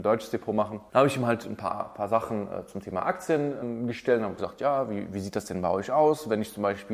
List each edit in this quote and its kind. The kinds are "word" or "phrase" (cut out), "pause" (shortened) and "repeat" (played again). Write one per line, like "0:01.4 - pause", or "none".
none